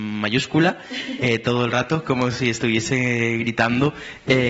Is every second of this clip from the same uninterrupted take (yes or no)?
yes